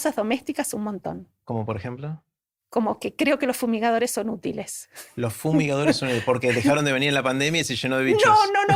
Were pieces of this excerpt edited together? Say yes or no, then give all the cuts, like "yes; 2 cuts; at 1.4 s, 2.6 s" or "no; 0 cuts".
no; 0 cuts